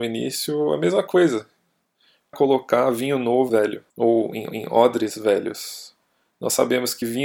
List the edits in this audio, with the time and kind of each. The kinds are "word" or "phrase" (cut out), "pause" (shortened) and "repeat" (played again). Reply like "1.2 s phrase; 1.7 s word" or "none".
2.3 s word; 3.5 s phrase; 3.9 s pause; 4.5 s repeat

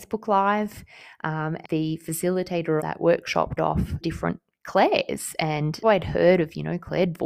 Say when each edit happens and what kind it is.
1.6 s word; 2.8 s word; 3.6 s word; 4.0 s word; 5.8 s word

